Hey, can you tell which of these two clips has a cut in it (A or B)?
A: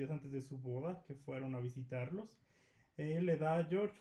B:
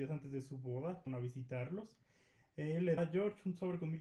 B